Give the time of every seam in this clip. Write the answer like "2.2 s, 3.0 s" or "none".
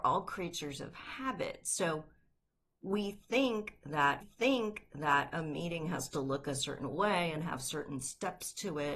4.2 s